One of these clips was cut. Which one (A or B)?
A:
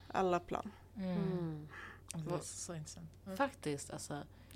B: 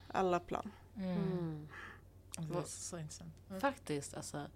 A